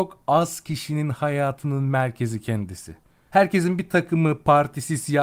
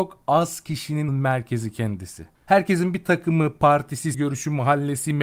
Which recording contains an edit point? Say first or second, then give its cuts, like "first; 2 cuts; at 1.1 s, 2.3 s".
second; 3 cuts; at 1.1 s, 2.3 s, 4.1 s